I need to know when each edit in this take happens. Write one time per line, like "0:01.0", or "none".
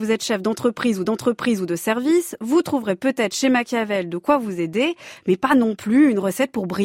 0:01.0